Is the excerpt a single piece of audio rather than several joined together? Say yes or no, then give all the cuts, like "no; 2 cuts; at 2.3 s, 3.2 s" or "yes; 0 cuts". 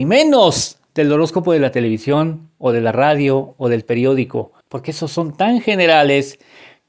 no; 1 cut; at 4.6 s